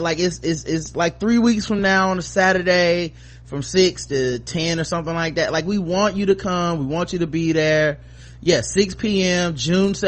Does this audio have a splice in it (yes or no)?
no